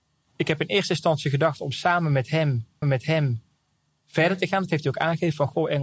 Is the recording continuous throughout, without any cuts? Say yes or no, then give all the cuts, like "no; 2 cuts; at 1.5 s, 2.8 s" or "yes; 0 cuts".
no; 1 cut; at 2.8 s